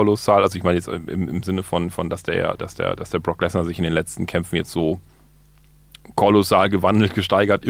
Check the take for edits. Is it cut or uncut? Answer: uncut